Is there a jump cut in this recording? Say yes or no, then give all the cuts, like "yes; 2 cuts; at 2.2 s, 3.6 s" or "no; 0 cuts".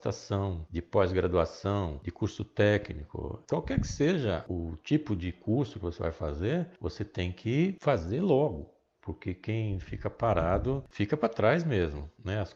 no; 0 cuts